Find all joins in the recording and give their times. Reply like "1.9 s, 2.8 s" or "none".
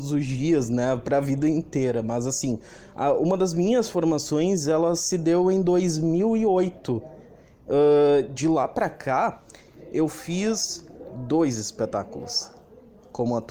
none

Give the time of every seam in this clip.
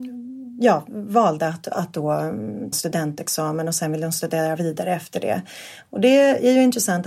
2.7 s

